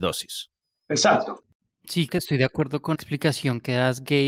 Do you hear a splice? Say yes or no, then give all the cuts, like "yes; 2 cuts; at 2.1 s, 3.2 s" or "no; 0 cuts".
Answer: yes; 2 cuts; at 2.1 s, 2.9 s